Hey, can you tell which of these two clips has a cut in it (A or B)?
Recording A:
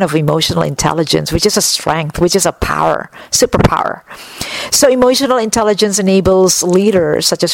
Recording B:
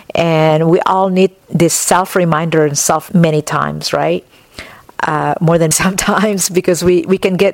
B